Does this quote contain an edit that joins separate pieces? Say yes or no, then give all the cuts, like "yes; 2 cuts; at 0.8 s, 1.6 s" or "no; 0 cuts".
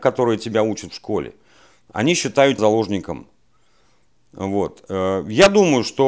yes; 1 cut; at 2.6 s